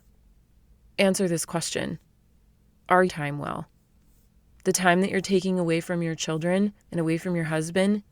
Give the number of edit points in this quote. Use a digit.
2